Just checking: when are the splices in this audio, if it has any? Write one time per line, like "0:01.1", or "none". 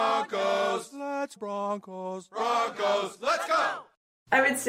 0:01.4